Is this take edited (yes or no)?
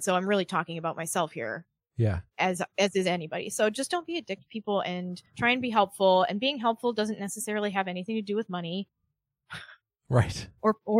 yes